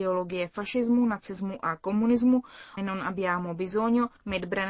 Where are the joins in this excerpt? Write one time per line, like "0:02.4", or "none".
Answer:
0:02.8